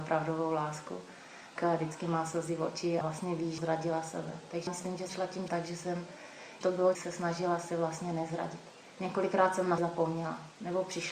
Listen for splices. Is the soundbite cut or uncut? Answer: cut